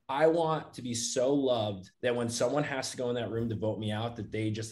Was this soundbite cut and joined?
yes; 1 cut; at 1.9 s

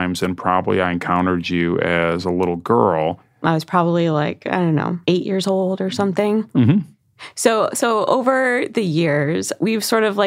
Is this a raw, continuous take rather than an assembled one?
no; 1 cut; at 5.0 s

